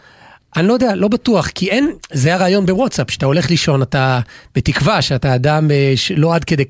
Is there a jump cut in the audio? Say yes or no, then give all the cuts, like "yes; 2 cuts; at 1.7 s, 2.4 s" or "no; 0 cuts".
no; 0 cuts